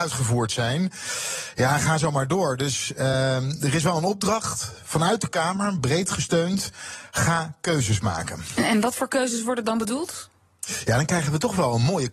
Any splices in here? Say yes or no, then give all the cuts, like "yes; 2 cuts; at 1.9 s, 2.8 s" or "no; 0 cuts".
no; 0 cuts